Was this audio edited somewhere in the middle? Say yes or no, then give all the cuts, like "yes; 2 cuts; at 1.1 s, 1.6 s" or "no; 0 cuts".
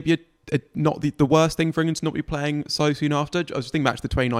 no; 0 cuts